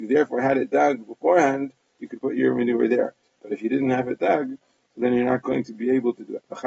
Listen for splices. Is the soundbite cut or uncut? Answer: uncut